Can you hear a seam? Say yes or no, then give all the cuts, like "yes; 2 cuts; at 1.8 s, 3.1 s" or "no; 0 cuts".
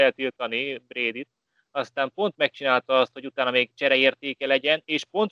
no; 0 cuts